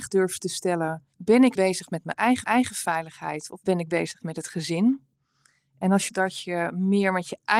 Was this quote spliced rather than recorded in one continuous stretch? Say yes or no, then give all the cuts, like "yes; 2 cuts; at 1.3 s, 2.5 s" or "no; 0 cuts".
yes; 4 cuts; at 1.1 s, 1.6 s, 2.4 s, 6.1 s